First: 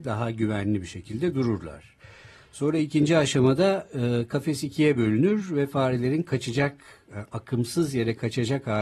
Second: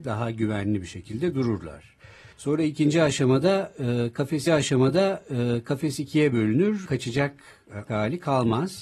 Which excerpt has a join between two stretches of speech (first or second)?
second